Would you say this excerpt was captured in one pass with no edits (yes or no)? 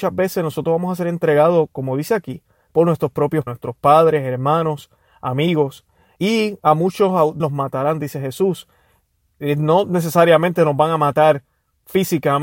no